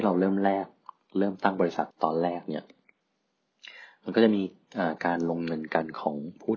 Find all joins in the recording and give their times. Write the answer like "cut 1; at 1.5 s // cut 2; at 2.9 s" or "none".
cut 1; at 1.9 s

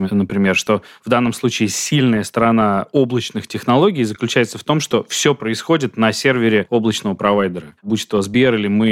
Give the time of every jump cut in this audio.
cut 1; at 7.8 s

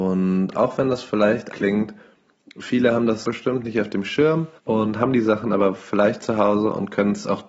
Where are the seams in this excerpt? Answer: cut 1; at 1.5 s // cut 2; at 3.2 s // cut 3; at 4.6 s

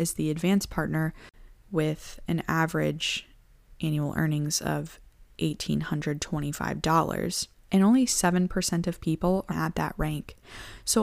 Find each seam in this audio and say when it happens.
cut 1; at 7.5 s // cut 2; at 9.5 s

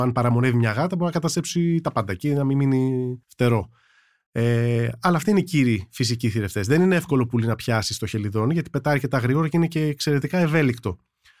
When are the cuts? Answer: cut 1; at 3.2 s

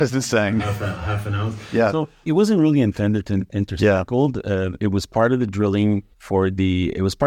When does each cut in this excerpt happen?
cut 1; at 2.2 s // cut 2; at 6.1 s

